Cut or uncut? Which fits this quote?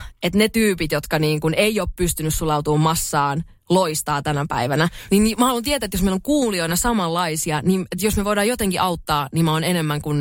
uncut